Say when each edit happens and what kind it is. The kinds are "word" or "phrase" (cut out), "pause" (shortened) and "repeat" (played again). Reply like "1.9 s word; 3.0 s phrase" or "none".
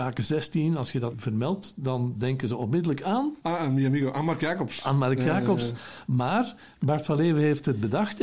1.1 s word